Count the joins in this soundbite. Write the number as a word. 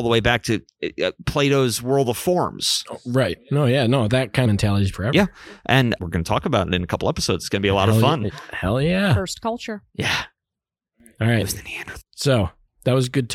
six